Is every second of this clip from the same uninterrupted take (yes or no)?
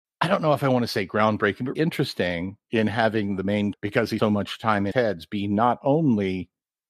no